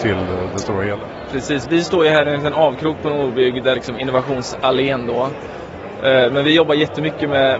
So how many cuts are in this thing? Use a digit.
1